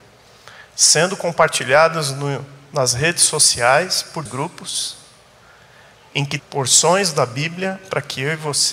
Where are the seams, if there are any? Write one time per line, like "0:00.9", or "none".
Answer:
0:04.3
0:06.4

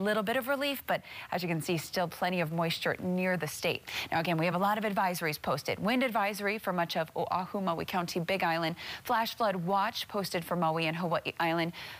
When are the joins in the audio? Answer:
none

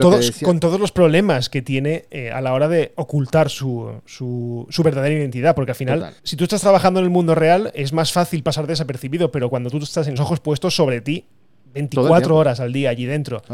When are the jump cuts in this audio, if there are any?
0:06.2
0:10.2

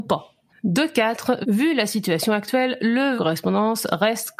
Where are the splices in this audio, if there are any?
0:03.2

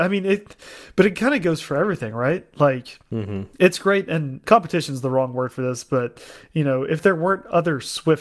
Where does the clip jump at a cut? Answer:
0:03.5
0:04.4

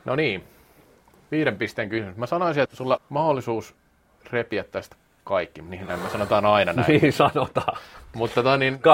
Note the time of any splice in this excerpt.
0:02.6
0:03.0

